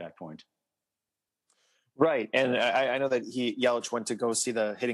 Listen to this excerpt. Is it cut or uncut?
uncut